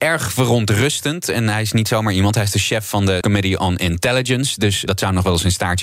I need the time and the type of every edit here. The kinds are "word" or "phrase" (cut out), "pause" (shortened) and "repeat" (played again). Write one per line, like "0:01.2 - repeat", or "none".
0:03.2 - phrase
0:04.9 - word